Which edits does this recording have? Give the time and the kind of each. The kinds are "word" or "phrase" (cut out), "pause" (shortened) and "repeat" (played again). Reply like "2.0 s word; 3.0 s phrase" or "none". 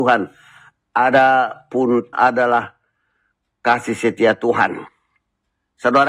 2.1 s word